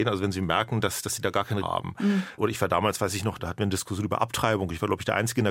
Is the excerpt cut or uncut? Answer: cut